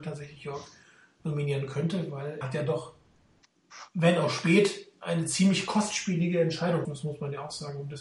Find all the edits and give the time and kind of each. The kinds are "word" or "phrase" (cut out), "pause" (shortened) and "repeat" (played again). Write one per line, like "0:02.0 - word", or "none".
0:02.4 - word
0:06.8 - word